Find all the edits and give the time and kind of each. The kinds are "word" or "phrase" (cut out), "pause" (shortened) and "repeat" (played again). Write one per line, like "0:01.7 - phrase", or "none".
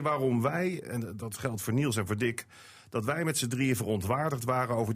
none